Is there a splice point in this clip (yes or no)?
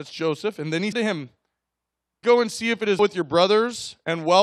yes